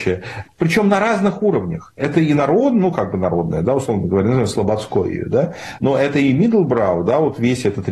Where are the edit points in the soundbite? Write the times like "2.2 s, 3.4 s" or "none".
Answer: none